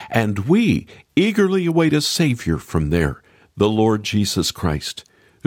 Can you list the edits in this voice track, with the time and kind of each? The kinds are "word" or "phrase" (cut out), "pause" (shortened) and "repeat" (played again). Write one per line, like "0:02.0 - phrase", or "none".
none